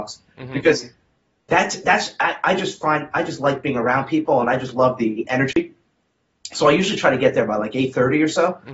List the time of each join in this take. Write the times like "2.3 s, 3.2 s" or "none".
none